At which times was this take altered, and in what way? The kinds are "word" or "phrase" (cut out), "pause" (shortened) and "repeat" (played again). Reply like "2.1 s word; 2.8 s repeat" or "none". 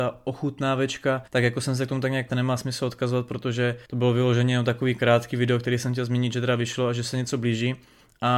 1.3 s pause; 2.3 s phrase; 3.9 s pause